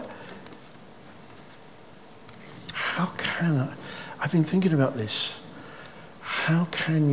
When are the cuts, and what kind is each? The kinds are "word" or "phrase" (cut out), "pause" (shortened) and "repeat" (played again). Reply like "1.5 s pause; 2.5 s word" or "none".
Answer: none